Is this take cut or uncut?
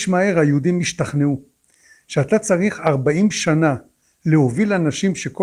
uncut